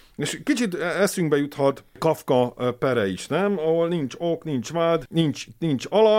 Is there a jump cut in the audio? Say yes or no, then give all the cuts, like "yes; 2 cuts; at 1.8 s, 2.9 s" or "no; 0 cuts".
no; 0 cuts